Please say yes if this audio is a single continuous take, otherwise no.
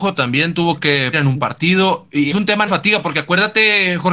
no